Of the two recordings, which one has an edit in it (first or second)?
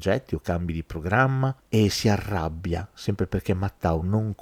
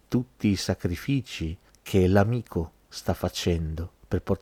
second